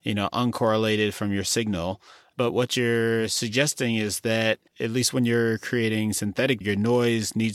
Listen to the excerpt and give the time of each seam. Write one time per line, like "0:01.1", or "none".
0:04.7
0:06.6